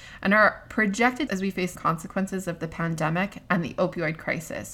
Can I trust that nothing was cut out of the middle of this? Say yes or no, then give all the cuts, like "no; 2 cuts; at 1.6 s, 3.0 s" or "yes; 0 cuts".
no; 2 cuts; at 1.3 s, 1.8 s